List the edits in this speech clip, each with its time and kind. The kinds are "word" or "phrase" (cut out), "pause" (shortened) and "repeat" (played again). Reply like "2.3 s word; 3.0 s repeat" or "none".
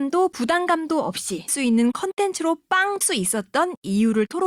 1.5 s word; 3.0 s word